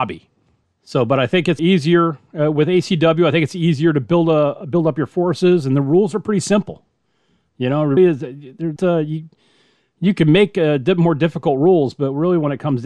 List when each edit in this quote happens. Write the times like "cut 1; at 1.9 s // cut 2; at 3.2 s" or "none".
cut 1; at 1.6 s // cut 2; at 8.0 s // cut 3; at 8.8 s